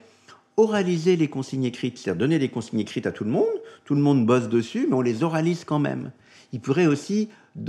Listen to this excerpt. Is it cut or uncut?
uncut